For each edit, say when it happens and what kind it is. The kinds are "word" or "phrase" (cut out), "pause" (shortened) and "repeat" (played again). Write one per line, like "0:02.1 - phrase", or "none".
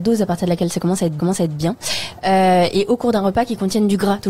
0:01.2 - repeat